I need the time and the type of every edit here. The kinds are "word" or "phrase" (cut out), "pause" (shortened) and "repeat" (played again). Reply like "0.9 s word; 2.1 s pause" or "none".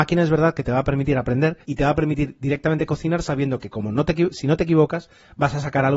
1.6 s pause